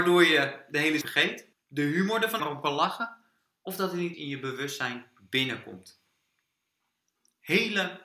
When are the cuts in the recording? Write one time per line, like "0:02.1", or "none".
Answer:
0:01.0
0:01.5
0:02.4
0:04.1